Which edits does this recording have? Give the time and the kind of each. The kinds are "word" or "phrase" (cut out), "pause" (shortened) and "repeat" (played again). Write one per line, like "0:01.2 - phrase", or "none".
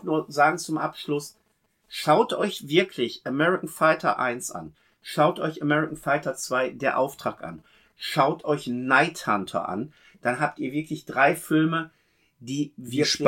none

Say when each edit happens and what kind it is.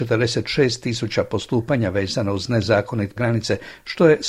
0:03.2 - word

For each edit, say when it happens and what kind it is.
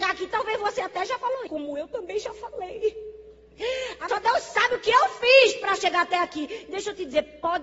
0:01.5 - word
0:04.1 - word

